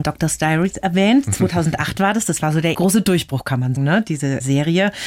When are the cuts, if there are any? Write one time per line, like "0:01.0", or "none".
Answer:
0:02.7
0:03.8